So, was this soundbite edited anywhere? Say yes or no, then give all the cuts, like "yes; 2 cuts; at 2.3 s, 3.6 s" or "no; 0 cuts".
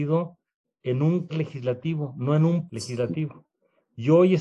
yes; 2 cuts; at 1.3 s, 2.7 s